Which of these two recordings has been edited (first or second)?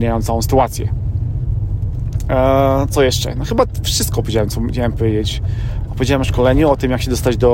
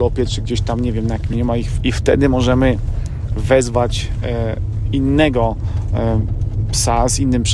second